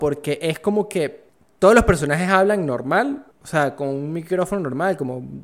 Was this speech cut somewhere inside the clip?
yes; 2 cuts; at 1.3 s, 3.3 s

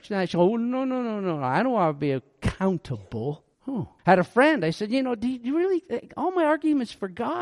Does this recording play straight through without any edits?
no; 2 cuts; at 3.5 s, 4.0 s

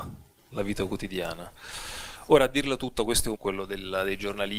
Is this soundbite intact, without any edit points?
no; 1 cut; at 3.3 s

